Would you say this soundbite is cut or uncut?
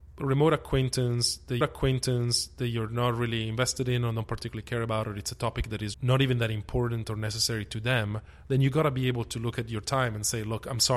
cut